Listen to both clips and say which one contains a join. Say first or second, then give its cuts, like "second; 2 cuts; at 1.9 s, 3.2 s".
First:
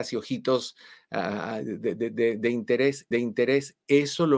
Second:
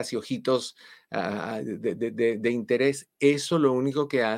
first; 1 cut; at 3.1 s